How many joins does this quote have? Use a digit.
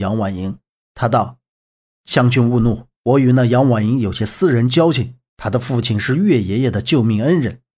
3